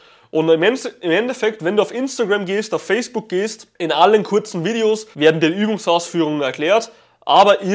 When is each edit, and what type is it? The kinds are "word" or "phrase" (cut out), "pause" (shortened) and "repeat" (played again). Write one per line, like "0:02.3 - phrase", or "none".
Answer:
0:03.7 - pause
0:05.1 - pause